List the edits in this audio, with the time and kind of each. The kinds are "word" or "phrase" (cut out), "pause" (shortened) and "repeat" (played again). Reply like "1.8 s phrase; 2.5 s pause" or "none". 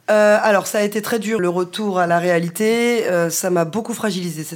1.4 s word